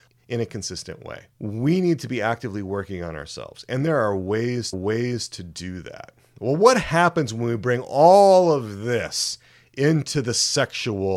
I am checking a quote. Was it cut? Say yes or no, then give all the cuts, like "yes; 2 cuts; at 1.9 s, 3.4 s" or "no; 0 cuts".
yes; 2 cuts; at 1.3 s, 4.7 s